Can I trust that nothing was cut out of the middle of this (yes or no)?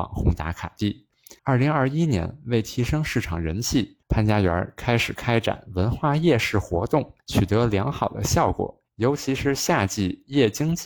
no